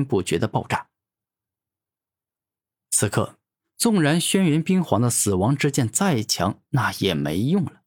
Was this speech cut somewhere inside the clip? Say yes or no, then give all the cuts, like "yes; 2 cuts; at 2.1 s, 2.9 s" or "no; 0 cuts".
no; 0 cuts